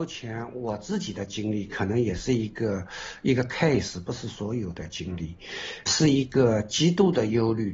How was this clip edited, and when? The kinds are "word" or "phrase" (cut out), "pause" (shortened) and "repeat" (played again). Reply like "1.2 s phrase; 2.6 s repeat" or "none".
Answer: 5.9 s word